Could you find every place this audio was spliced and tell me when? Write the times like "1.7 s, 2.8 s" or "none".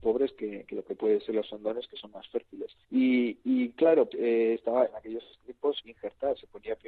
2.8 s, 4.1 s, 4.9 s, 5.8 s